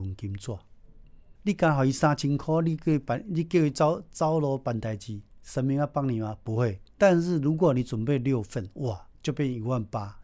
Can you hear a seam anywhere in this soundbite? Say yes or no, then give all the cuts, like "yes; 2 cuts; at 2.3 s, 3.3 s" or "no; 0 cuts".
yes; 3 cuts; at 1.4 s, 6.9 s, 9.1 s